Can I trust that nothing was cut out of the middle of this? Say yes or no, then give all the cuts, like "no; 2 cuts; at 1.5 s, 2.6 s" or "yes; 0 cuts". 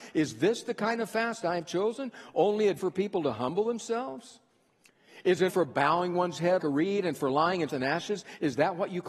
no; 4 cuts; at 2.8 s, 5.5 s, 6.6 s, 7.7 s